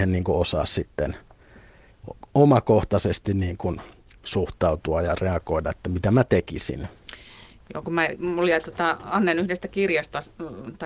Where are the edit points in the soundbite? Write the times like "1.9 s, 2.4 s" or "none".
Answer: 4.2 s

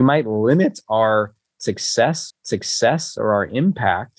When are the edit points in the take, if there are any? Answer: 2.3 s

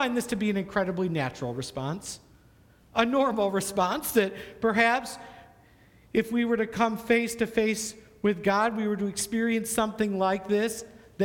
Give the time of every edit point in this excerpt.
none

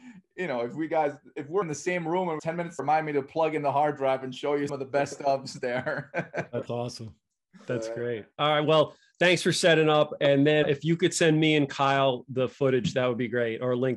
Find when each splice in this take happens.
1.6 s, 2.4 s, 2.8 s, 4.7 s, 10.6 s

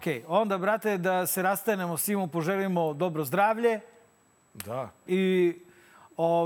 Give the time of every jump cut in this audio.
none

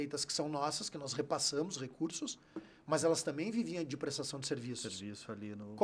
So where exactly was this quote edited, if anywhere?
none

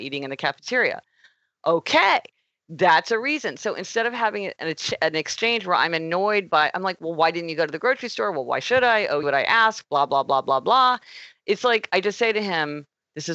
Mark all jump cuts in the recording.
9.2 s

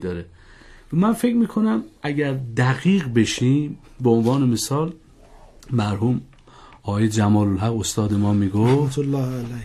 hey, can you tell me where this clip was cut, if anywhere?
none

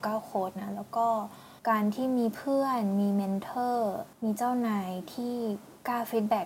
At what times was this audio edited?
1.6 s, 4.1 s

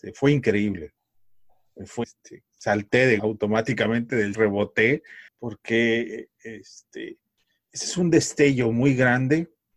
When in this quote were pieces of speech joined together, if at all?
2.0 s, 3.2 s, 4.3 s, 5.3 s

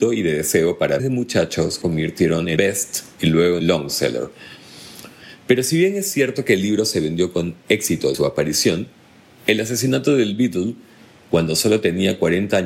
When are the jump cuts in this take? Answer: 1.0 s, 1.8 s, 2.6 s, 3.6 s, 8.1 s

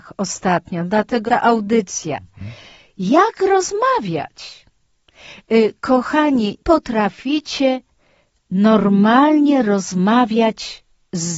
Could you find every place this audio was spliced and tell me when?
1.3 s, 6.6 s

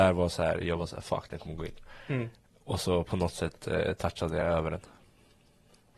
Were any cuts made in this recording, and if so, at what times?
none

